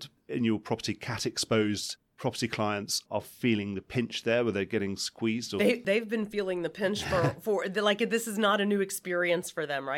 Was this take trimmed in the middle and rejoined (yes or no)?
no